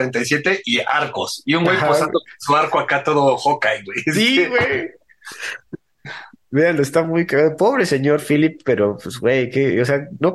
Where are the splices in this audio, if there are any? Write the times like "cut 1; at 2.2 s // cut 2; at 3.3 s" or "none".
none